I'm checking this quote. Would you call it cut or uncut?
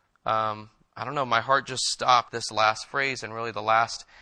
cut